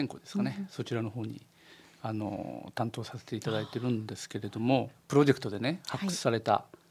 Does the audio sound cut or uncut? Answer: cut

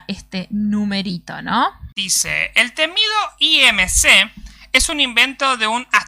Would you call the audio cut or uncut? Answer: cut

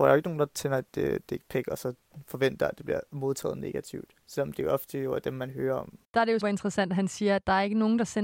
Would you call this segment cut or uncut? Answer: cut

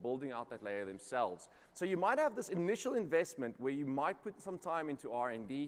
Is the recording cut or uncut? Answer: uncut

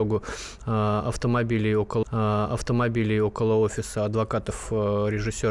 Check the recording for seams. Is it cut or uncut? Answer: cut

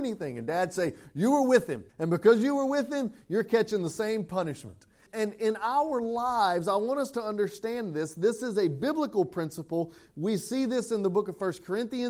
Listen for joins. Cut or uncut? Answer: cut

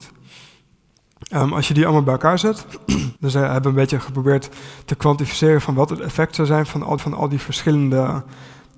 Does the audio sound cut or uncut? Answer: cut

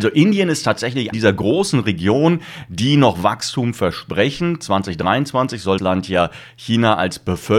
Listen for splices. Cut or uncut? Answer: cut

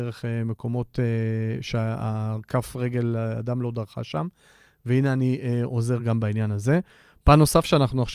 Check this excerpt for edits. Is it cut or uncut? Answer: uncut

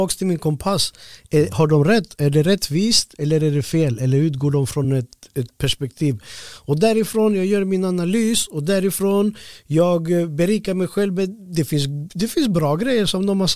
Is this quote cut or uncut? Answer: uncut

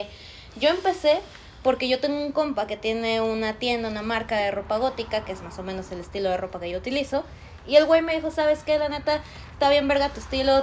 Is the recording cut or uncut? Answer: uncut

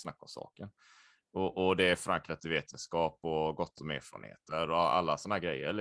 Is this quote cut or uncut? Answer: uncut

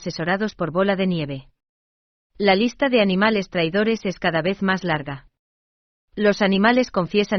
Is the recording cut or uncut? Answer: uncut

